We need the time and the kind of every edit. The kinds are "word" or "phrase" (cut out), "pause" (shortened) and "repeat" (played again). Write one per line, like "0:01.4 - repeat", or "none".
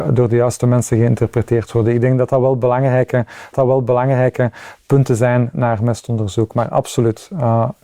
0:03.5 - repeat